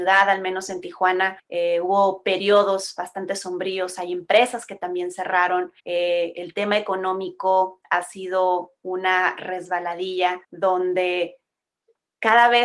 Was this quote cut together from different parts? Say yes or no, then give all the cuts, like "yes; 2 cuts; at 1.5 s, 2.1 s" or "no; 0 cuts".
yes; 3 cuts; at 1.4 s, 5.8 s, 10.4 s